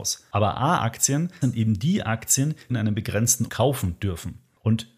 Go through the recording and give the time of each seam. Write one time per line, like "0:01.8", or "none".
0:01.4
0:02.7
0:03.5